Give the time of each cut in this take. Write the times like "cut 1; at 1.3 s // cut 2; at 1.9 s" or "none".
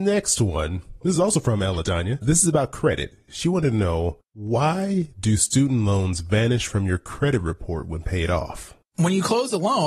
none